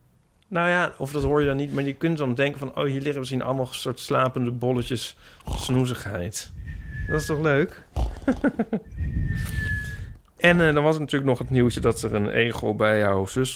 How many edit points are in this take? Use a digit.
0